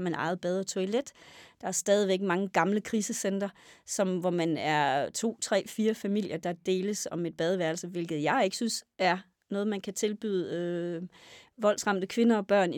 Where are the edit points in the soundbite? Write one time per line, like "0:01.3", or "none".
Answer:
none